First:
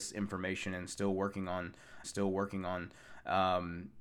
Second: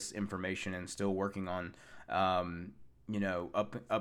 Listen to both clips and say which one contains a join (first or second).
first